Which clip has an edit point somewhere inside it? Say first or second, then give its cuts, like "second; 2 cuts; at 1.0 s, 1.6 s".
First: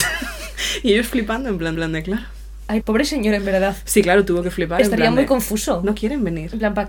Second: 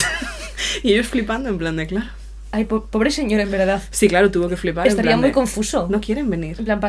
first; 2 cuts; at 1.7 s, 2.8 s